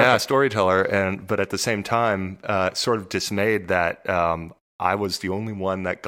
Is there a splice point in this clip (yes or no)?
no